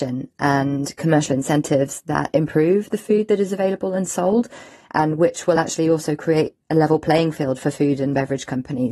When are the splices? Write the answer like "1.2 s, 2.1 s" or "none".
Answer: none